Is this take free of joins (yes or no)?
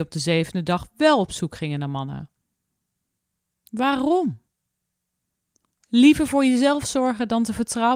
yes